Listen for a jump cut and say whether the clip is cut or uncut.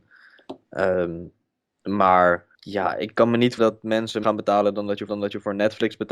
cut